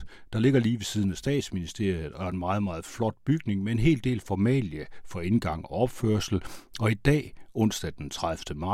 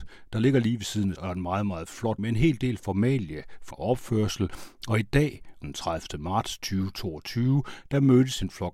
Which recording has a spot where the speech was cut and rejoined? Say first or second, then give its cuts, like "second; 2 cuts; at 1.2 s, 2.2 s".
second; 4 cuts; at 1.2 s, 2.2 s, 3.7 s, 5.6 s